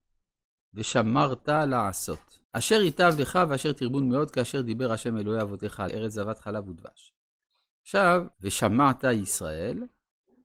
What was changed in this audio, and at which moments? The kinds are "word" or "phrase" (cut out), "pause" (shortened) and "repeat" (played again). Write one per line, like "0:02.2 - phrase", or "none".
0:02.4 - pause
0:05.9 - word
0:08.3 - pause